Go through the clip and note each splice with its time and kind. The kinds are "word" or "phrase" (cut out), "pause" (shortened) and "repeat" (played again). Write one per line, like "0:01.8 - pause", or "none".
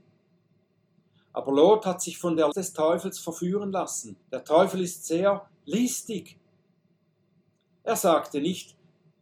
0:02.5 - word
0:04.2 - pause

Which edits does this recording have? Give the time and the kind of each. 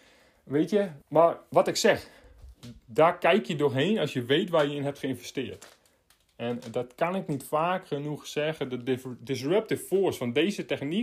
0:01.0 - pause

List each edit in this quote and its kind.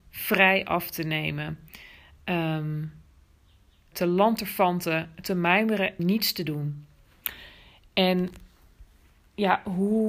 0:03.9 - word
0:06.0 - word

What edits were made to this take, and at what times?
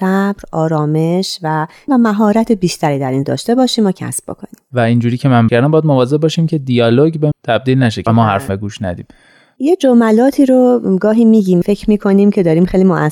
0:01.9 - word
0:03.2 - word
0:05.5 - word
0:07.3 - word
0:08.1 - word
0:08.5 - word
0:11.6 - word

